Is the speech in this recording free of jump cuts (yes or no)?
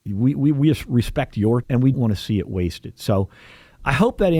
no